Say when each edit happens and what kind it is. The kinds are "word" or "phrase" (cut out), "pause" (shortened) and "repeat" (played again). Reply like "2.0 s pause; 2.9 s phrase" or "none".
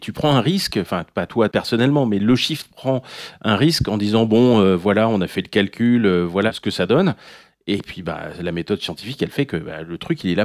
none